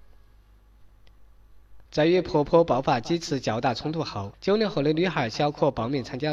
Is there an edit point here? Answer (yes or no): yes